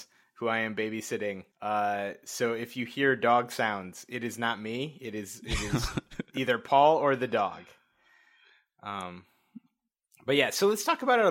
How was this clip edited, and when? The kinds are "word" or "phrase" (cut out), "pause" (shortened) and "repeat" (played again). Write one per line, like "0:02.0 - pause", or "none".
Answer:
0:01.5 - pause